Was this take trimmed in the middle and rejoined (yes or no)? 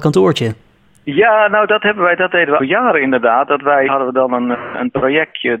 yes